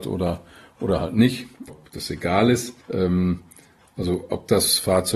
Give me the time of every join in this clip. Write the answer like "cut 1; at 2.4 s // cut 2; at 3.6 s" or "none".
cut 1; at 1.7 s // cut 2; at 2.8 s

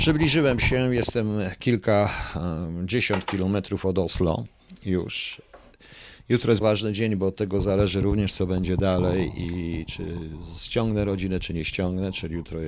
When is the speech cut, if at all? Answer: cut 1; at 6.6 s

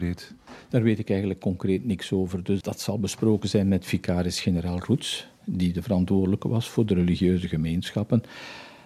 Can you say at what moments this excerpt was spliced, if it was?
cut 1; at 2.6 s

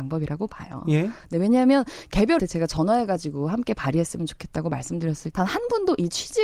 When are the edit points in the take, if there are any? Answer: cut 1; at 2.4 s // cut 2; at 5.3 s

